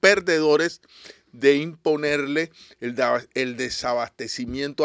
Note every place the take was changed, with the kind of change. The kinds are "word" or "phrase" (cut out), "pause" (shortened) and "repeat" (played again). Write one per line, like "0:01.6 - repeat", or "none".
none